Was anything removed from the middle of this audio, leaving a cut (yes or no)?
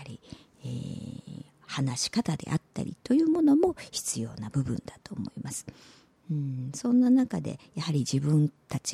no